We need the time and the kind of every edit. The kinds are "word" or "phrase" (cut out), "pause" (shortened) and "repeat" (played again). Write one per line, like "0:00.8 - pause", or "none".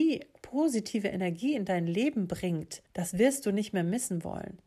0:02.9 - pause